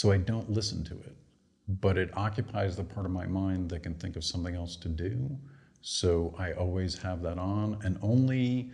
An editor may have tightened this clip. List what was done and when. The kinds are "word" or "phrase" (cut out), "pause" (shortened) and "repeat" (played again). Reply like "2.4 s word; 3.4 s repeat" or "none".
none